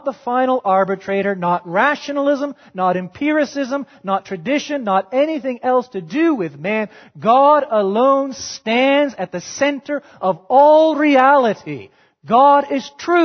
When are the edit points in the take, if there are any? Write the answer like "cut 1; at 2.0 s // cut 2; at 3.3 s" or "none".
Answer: none